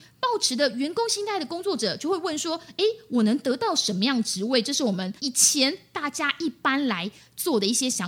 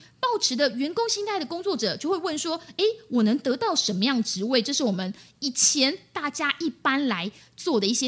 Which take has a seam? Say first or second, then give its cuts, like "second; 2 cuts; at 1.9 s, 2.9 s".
first; 1 cut; at 5.2 s